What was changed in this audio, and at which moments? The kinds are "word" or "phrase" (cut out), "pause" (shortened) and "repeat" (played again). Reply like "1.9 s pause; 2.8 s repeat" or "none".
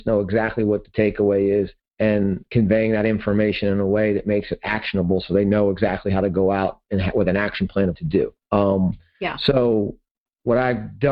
7.9 s word